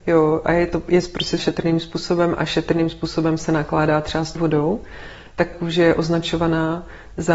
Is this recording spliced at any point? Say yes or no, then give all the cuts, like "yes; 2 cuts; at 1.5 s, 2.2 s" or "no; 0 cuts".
yes; 3 cuts; at 1.4 s, 4.4 s, 5.5 s